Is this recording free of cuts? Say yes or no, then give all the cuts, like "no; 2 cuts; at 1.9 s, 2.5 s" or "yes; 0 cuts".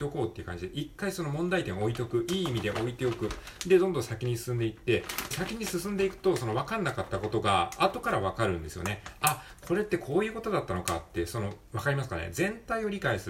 no; 1 cut; at 5.3 s